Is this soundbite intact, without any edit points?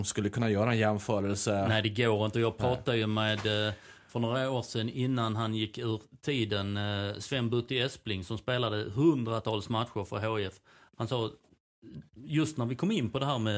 yes; 0 cuts

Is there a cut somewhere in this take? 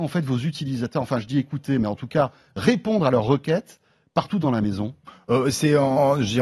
no; 0 cuts

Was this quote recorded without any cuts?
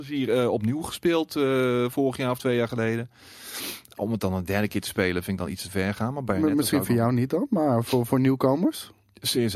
yes; 0 cuts

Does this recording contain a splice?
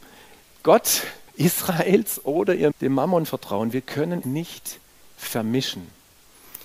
yes; 3 cuts; at 1.3 s, 2.7 s, 4.2 s

